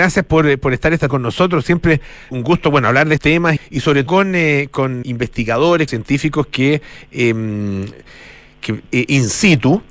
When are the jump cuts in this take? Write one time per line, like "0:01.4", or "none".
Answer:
0:01.1
0:02.3
0:03.2
0:03.6
0:04.1
0:05.0
0:05.9
0:08.9